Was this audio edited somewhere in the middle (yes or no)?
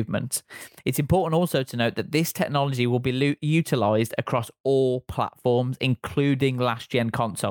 no